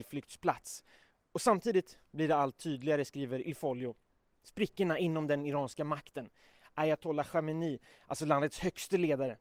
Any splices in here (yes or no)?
no